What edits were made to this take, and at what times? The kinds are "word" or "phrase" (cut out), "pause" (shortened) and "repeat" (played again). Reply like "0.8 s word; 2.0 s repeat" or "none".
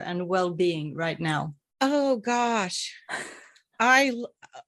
1.6 s pause